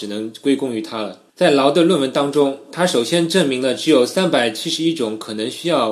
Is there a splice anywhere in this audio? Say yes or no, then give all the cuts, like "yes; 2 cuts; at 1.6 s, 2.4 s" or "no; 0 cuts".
yes; 1 cut; at 1.3 s